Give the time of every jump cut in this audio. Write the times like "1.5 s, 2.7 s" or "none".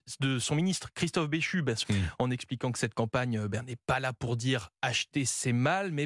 1.8 s

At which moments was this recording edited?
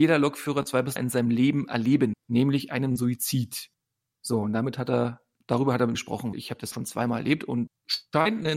1.0 s, 2.1 s, 5.4 s, 5.9 s, 6.3 s, 6.7 s, 7.7 s

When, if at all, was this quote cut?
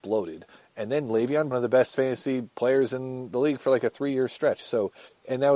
1.5 s

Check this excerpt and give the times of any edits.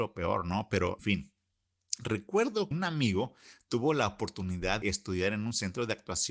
1.0 s, 2.7 s, 4.8 s

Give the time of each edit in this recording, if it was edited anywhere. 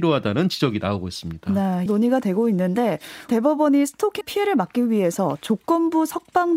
1.9 s, 3.3 s, 4.2 s

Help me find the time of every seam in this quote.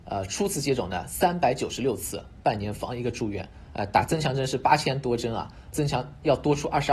5.7 s

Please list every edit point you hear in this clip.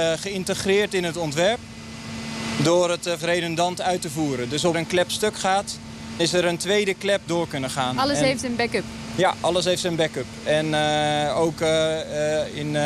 3.2 s, 4.7 s, 6.2 s, 7.3 s

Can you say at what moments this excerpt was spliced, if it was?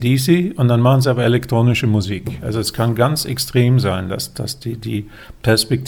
none

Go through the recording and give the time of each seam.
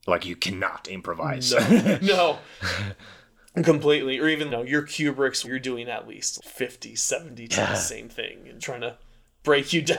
4.5 s, 5.4 s, 6.4 s, 7.5 s, 8.6 s

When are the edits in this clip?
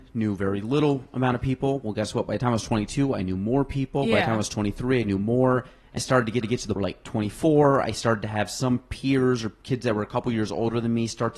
6.0 s, 6.4 s, 6.8 s

